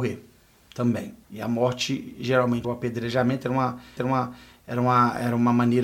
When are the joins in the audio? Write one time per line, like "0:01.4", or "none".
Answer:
0:01.2
0:02.6
0:04.0